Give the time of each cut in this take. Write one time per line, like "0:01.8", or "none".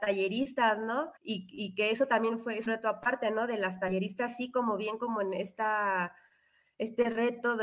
0:01.2
0:02.7